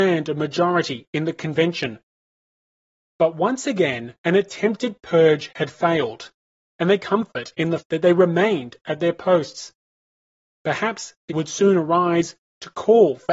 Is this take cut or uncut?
cut